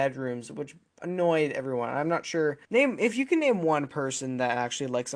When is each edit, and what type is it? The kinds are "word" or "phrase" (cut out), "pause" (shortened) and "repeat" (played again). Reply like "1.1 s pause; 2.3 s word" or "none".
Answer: 2.6 s pause